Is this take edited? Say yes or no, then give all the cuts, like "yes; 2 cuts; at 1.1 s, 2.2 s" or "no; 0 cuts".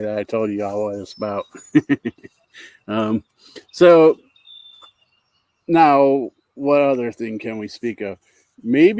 no; 0 cuts